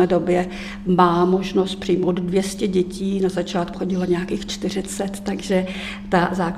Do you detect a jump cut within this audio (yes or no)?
yes